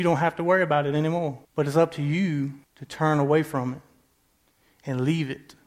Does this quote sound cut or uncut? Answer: cut